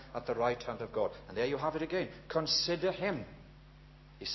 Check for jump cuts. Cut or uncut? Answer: uncut